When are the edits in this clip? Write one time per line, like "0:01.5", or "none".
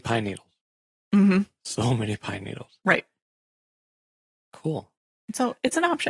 none